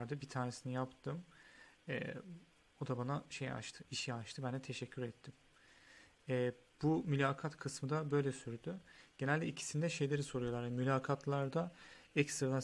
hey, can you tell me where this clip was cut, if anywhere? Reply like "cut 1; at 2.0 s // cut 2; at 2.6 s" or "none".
none